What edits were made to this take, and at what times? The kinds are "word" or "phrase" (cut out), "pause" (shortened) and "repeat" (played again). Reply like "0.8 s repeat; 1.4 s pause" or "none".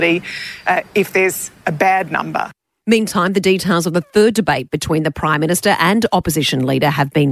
none